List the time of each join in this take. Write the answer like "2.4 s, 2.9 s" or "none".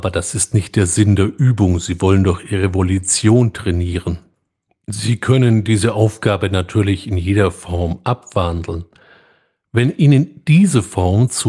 none